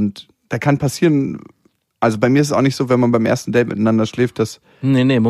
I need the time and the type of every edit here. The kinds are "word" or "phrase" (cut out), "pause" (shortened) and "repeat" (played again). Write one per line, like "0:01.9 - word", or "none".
none